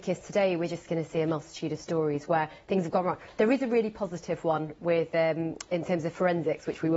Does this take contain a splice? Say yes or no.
no